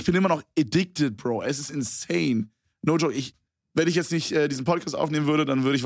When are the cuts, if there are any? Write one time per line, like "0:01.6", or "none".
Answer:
0:03.5